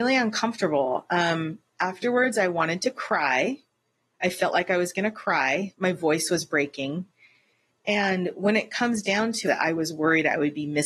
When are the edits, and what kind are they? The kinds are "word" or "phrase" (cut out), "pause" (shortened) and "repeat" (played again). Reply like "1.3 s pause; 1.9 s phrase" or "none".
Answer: 9.4 s phrase

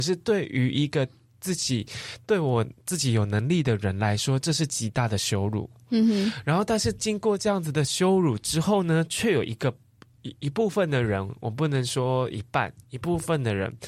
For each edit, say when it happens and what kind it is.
none

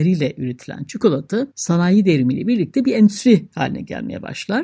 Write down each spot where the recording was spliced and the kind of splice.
1.5 s pause

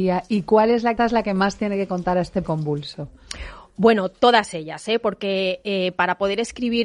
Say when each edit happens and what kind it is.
1.0 s phrase; 2.4 s word

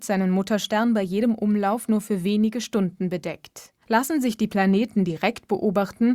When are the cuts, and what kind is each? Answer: 3.8 s pause

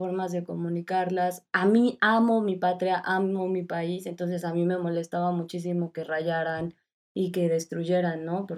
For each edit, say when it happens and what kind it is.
none

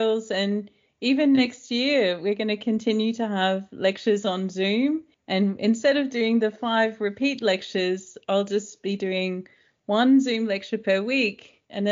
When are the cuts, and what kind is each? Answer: none

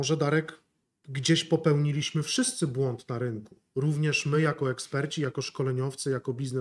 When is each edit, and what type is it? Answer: none

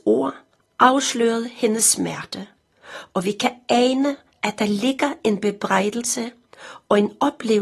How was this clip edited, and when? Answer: none

